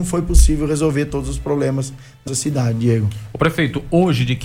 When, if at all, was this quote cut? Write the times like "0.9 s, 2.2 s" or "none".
2.3 s